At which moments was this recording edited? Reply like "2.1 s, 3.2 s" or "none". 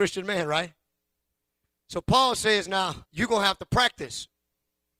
3.0 s